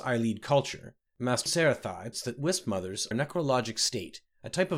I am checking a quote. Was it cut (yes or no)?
yes